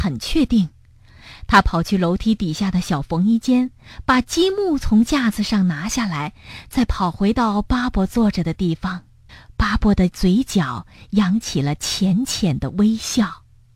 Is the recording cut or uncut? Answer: cut